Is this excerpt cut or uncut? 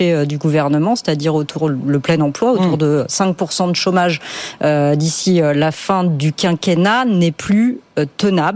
uncut